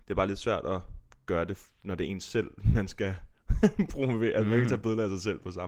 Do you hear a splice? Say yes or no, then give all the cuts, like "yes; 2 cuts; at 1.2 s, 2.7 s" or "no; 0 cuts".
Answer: no; 0 cuts